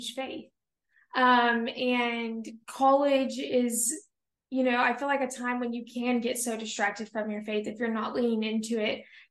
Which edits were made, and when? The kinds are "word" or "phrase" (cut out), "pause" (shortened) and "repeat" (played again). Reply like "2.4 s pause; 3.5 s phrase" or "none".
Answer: none